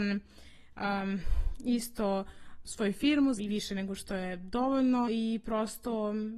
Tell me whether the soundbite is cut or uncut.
cut